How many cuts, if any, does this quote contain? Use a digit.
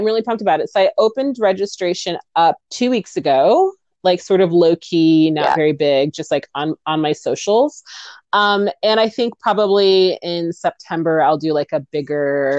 1